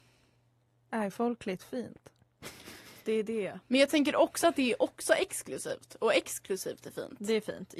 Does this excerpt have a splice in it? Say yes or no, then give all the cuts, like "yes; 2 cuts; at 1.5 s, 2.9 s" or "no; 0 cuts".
no; 0 cuts